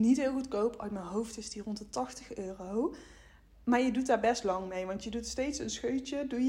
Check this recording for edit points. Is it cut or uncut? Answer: uncut